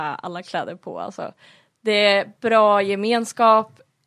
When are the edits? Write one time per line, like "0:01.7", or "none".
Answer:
none